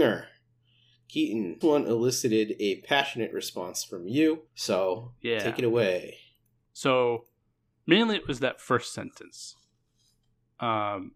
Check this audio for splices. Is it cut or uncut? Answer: cut